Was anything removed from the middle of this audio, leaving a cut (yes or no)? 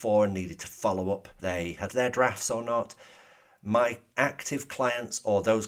yes